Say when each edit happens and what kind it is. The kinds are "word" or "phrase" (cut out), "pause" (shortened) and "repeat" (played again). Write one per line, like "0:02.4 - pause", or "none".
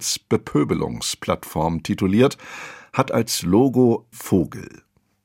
0:04.1 - word